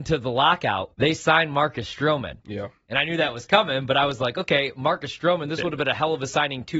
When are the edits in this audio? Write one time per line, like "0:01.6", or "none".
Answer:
0:00.9